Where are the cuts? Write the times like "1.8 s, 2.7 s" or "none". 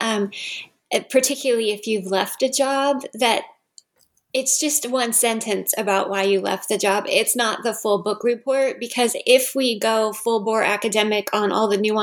none